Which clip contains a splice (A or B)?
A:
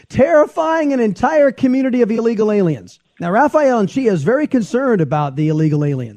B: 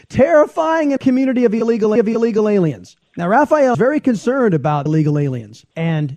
B